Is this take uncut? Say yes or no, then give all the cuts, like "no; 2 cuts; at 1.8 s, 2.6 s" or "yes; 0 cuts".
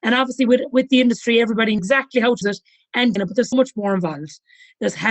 no; 4 cuts; at 1.8 s, 2.4 s, 3.2 s, 3.5 s